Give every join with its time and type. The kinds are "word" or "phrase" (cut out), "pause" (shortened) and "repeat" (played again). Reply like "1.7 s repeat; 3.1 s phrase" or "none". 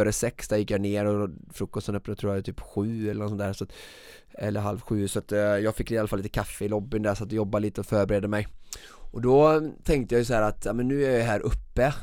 none